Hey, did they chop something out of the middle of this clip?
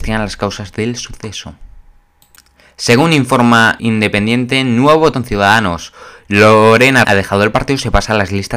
yes; 3 cuts; at 3.8 s, 5.1 s, 7.0 s

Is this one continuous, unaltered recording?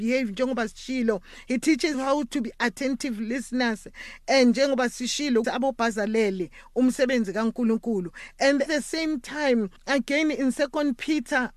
no; 4 cuts; at 1.9 s, 5.4 s, 8.7 s, 9.8 s

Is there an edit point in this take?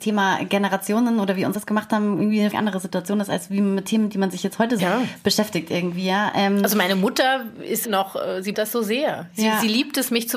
yes; 5 cuts; at 1.5 s, 2.5 s, 4.8 s, 7.8 s, 8.5 s

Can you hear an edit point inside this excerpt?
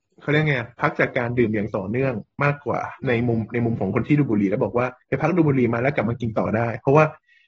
yes; 2 cuts; at 3.0 s, 5.0 s

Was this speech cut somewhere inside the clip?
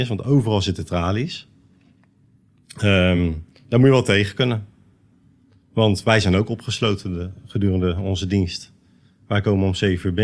no; 0 cuts

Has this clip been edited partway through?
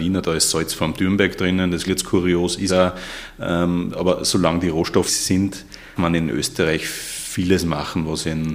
yes; 4 cuts; at 1.9 s, 2.7 s, 5.1 s, 6.0 s

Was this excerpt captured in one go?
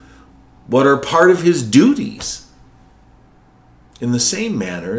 yes; 0 cuts

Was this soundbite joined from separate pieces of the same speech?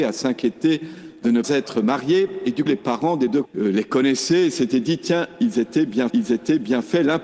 yes; 4 cuts; at 1.4 s, 2.7 s, 3.4 s, 6.1 s

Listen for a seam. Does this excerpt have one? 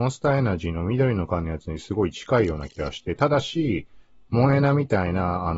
no; 0 cuts

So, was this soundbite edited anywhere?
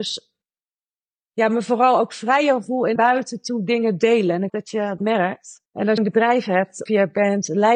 yes; 6 cuts; at 3.0 s, 4.5 s, 5.0 s, 5.7 s, 6.0 s, 6.9 s

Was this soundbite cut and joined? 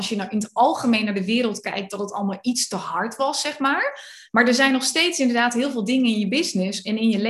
no; 0 cuts

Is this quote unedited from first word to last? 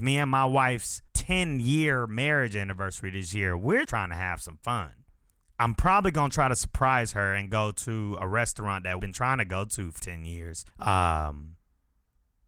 no; 6 cuts; at 1.1 s, 3.8 s, 5.3 s, 9.0 s, 10.0 s, 10.7 s

